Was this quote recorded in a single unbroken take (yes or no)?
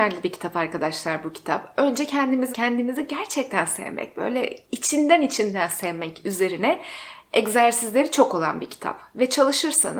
no